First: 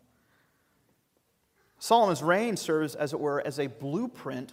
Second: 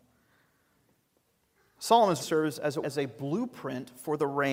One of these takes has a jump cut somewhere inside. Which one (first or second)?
second